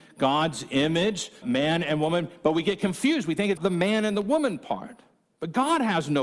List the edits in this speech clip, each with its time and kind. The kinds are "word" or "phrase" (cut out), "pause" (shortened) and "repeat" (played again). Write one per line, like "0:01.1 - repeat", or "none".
0:01.4 - word
0:03.6 - word